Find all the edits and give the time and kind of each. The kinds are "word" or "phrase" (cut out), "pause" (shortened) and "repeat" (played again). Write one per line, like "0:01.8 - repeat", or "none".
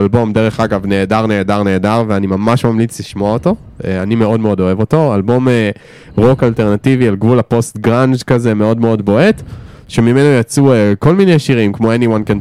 none